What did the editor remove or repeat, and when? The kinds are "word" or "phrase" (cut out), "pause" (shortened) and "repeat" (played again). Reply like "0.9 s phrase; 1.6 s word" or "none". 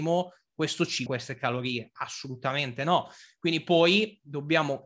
1.1 s phrase

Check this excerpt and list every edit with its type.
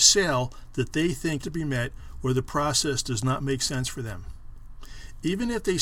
1.4 s word

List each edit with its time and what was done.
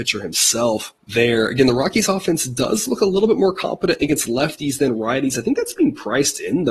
1.0 s pause

